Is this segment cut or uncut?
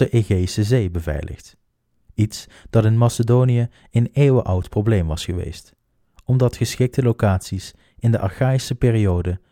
uncut